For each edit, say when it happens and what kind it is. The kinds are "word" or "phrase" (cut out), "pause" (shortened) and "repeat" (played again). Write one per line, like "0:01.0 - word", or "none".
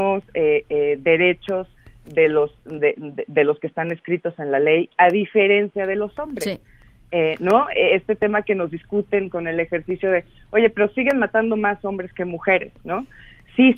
none